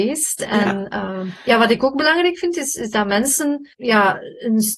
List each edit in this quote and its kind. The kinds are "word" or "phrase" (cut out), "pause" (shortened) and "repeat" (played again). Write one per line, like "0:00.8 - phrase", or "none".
0:03.7 - pause